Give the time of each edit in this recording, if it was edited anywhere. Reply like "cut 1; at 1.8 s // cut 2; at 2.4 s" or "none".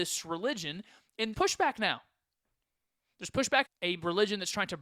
cut 1; at 1.3 s // cut 2; at 3.6 s